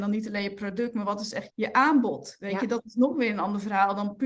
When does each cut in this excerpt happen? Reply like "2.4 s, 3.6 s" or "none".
1.5 s

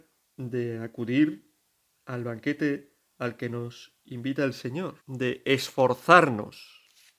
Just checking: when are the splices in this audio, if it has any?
1.6 s, 5.0 s

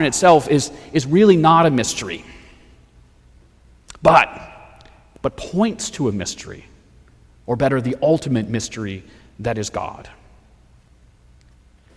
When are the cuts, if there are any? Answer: none

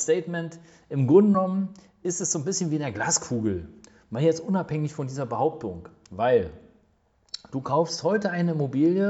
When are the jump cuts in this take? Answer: none

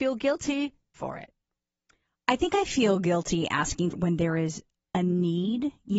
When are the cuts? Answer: 0.9 s, 3.9 s

